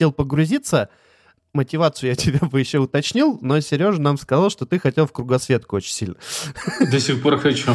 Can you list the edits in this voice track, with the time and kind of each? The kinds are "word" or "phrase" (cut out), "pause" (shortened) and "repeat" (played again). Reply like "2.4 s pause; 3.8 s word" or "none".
none